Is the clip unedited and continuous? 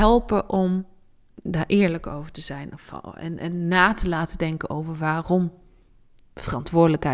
yes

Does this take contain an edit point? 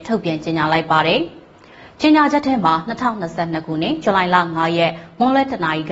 no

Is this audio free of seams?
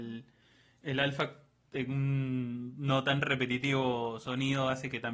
yes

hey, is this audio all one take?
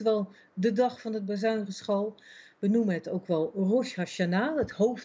yes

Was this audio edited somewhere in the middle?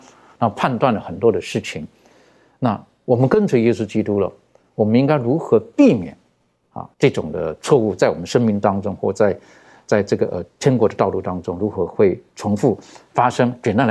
yes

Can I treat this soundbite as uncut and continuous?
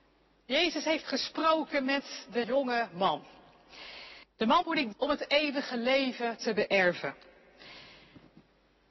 no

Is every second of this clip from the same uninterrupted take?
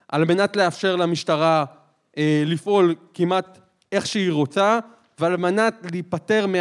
yes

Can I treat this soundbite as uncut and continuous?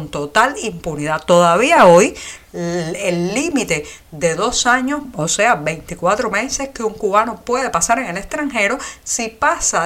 yes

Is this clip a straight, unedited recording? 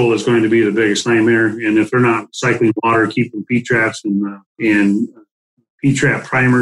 no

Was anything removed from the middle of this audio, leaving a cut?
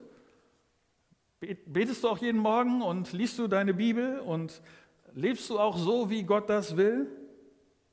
no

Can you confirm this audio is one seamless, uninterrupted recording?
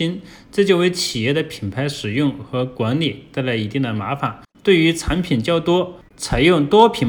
no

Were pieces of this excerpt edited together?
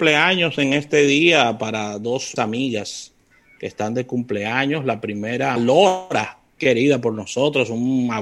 yes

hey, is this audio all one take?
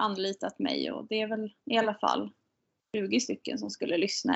no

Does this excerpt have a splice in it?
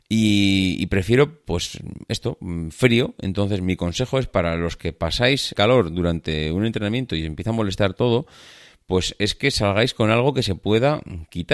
yes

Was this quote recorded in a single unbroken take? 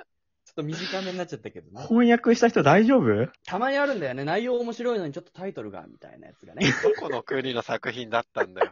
no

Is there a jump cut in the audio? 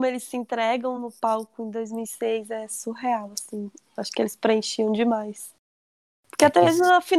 no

